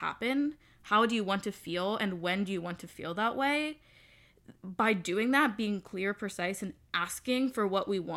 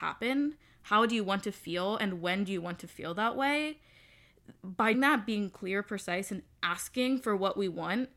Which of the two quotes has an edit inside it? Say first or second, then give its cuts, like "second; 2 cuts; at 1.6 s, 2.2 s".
second; 1 cut; at 4.9 s